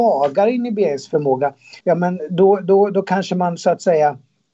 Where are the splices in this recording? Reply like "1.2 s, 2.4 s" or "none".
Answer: 1.8 s